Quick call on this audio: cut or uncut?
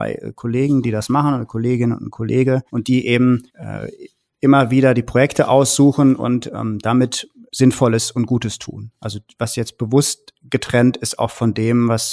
cut